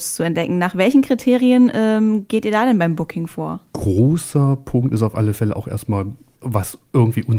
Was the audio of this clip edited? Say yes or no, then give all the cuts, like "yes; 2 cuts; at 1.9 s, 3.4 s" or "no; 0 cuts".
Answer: yes; 1 cut; at 3.7 s